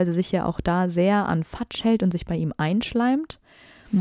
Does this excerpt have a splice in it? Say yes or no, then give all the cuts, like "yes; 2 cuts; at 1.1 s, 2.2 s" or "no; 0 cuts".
no; 0 cuts